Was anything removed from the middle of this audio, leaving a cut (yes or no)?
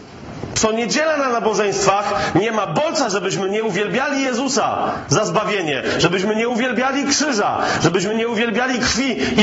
no